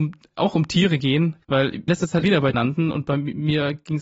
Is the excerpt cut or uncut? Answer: cut